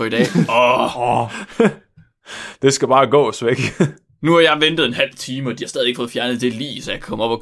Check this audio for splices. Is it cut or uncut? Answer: uncut